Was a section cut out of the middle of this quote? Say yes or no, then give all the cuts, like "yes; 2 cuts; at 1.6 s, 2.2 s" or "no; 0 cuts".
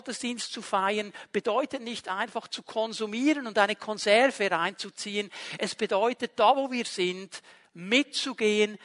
no; 0 cuts